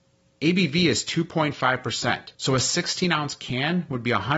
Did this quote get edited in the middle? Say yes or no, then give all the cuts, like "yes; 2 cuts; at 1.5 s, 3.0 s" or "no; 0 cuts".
yes; 1 cut; at 2.3 s